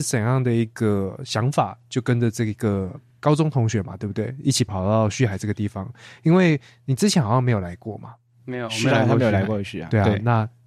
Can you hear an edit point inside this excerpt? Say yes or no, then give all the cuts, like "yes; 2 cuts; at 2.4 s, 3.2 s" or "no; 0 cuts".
no; 0 cuts